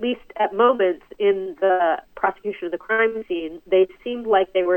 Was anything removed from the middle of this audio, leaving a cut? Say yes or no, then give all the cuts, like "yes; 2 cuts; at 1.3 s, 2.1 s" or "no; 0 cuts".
no; 0 cuts